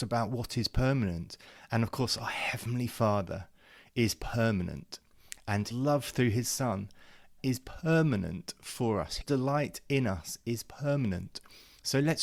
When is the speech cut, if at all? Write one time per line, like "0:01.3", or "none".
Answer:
0:05.7
0:07.4
0:09.2